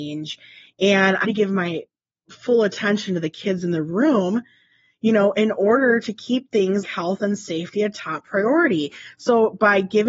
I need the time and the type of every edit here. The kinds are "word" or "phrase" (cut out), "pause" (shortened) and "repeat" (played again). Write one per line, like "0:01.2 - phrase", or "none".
0:01.2 - word
0:06.8 - word